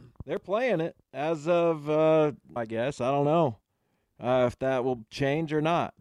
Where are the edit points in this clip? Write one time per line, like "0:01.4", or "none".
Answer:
0:02.6